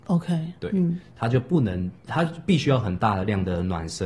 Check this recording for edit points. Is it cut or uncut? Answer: cut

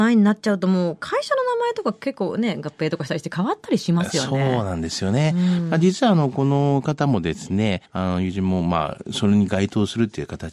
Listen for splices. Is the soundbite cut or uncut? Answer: cut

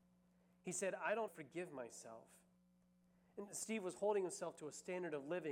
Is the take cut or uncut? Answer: cut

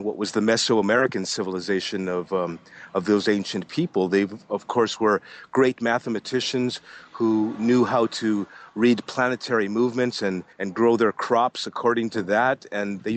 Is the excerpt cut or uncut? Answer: cut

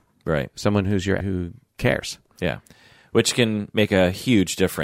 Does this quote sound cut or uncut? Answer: cut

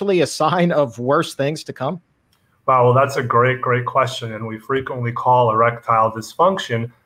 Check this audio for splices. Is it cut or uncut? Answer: uncut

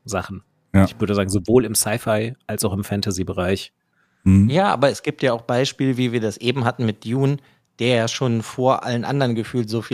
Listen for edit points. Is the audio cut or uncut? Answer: uncut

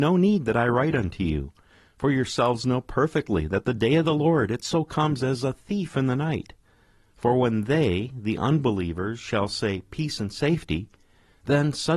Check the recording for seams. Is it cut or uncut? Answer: uncut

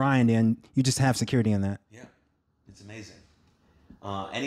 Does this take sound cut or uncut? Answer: uncut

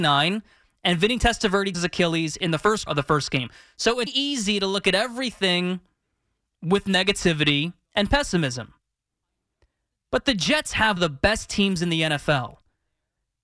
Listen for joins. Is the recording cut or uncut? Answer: cut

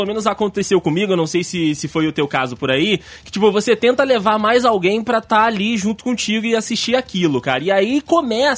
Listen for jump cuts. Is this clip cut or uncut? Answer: uncut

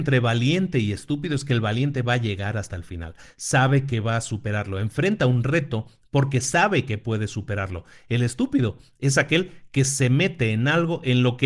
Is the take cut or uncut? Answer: uncut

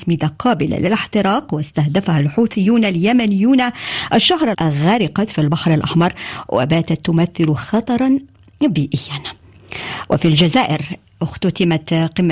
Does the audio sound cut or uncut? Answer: cut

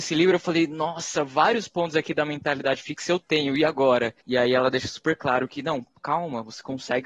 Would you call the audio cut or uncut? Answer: cut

